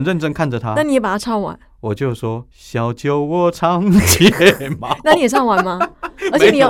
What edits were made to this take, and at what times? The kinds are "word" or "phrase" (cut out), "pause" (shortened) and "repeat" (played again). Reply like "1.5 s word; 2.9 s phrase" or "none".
2.5 s pause